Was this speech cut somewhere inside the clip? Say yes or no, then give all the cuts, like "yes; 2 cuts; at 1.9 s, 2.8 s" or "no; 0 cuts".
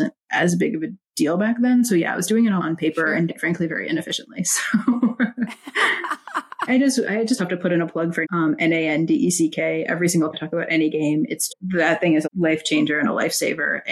yes; 9 cuts; at 2.6 s, 3.3 s, 3.7 s, 6.7 s, 7.4 s, 8.2 s, 10.3 s, 11.5 s, 12.2 s